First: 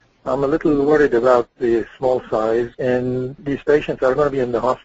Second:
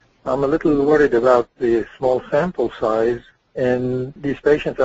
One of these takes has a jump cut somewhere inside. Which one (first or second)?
first